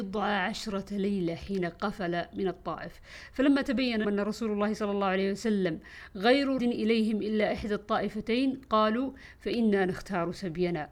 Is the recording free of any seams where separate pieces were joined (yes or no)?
no